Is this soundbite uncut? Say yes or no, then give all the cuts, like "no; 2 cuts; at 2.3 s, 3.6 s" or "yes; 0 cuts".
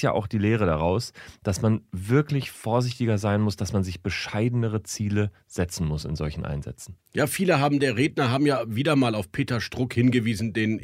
yes; 0 cuts